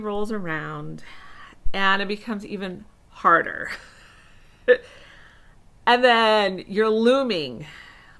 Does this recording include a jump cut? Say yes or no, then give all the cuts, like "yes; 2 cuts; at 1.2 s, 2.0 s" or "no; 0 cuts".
no; 0 cuts